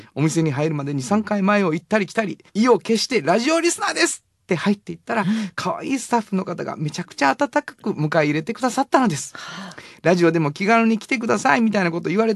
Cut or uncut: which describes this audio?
cut